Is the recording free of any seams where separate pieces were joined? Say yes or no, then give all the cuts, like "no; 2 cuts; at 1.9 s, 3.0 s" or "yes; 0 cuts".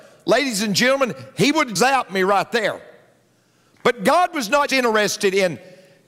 no; 2 cuts; at 1.8 s, 4.7 s